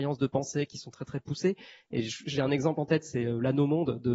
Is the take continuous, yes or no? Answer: yes